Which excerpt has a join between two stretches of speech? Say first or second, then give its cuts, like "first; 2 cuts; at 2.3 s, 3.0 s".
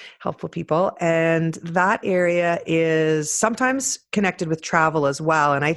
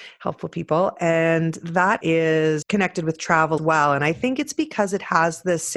second; 3 cuts; at 2.0 s, 2.6 s, 3.6 s